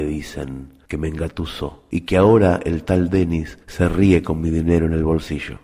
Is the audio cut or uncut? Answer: uncut